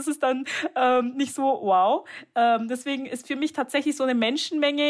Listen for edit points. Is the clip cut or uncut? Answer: uncut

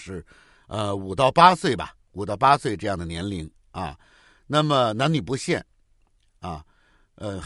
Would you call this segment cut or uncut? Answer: uncut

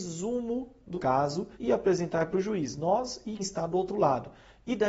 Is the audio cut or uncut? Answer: cut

